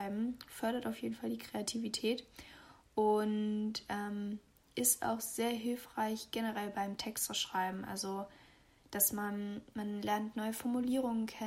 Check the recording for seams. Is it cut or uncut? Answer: uncut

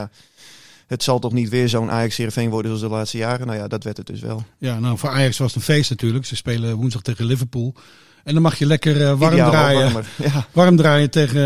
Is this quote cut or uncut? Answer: uncut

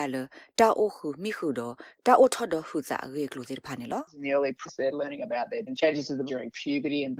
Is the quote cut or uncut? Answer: cut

